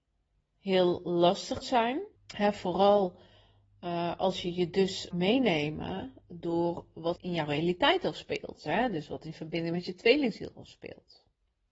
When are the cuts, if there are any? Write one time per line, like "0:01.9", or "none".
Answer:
0:01.6
0:02.2
0:05.1
0:07.2